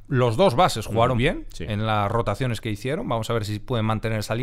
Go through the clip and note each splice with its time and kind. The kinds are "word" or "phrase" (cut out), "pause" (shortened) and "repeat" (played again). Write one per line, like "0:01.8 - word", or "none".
0:01.2 - word
0:02.6 - word